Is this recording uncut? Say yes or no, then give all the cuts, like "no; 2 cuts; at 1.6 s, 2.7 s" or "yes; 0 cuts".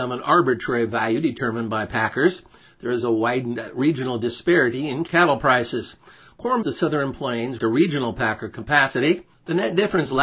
no; 3 cuts; at 5.1 s, 6.6 s, 7.6 s